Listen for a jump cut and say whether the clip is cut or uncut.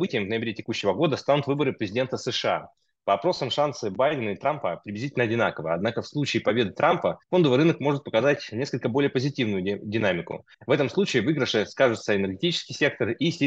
cut